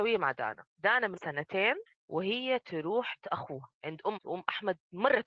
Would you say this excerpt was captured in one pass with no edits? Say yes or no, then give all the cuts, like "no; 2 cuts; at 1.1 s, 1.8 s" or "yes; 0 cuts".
no; 5 cuts; at 1.2 s, 1.9 s, 3.2 s, 3.7 s, 4.2 s